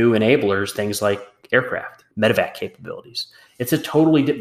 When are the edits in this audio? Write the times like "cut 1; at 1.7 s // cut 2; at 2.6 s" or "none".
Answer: cut 1; at 2.1 s

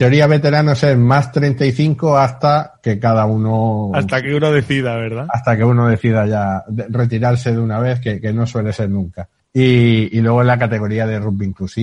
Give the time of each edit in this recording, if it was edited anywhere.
cut 1; at 9.4 s

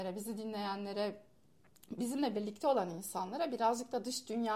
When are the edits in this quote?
none

